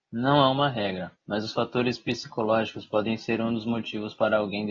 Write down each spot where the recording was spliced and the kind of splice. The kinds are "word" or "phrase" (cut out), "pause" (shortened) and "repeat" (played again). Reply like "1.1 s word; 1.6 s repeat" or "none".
1.2 s pause